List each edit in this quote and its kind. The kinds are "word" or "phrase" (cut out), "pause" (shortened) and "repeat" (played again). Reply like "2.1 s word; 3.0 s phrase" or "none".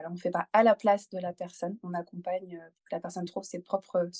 none

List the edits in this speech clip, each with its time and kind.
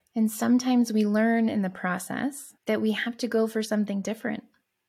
2.6 s pause

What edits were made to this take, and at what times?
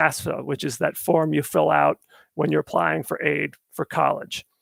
none

